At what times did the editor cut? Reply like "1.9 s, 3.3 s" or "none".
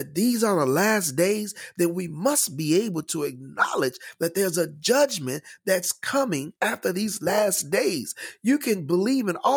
6.6 s